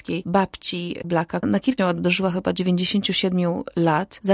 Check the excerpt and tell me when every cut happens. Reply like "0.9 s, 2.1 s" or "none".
1.0 s, 1.4 s, 1.8 s